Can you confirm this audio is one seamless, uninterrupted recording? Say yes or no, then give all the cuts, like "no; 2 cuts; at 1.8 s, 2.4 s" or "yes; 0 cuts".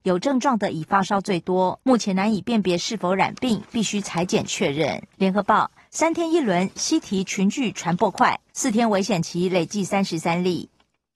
no; 3 cuts; at 1.8 s, 5.1 s, 8.5 s